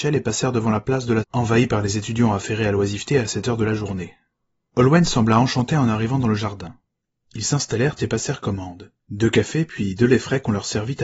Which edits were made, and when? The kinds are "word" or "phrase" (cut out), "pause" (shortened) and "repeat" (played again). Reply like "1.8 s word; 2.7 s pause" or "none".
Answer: 1.2 s word; 9.0 s pause